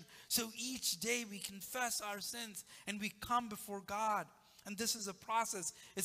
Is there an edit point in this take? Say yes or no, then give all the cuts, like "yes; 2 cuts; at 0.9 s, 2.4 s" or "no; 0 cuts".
no; 0 cuts